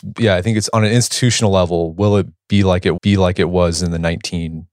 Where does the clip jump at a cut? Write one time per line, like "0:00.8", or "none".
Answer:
0:03.0